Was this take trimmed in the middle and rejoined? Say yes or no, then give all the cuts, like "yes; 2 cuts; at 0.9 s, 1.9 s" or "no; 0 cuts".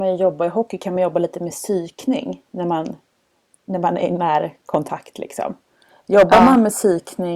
no; 0 cuts